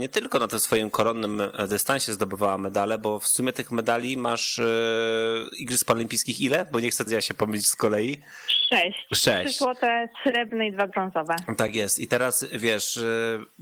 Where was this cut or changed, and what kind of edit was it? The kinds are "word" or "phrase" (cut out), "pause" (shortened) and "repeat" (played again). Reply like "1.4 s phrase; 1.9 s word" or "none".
7.1 s word

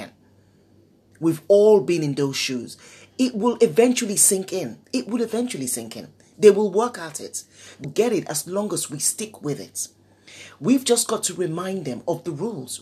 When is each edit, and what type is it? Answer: 7.8 s word

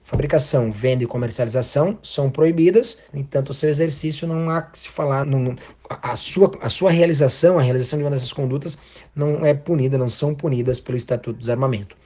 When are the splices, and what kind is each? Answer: 3.1 s pause; 5.2 s word

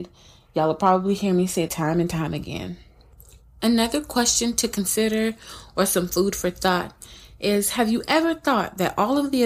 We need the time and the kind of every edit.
1.7 s word

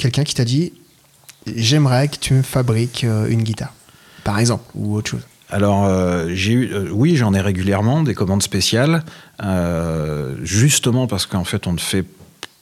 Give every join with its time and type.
none

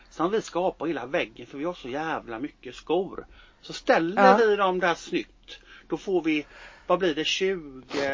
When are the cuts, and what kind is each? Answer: none

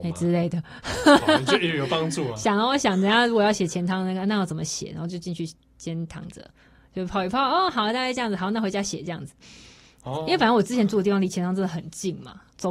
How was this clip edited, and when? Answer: none

